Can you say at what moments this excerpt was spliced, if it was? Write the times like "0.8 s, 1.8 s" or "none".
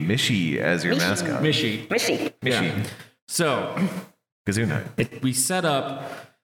none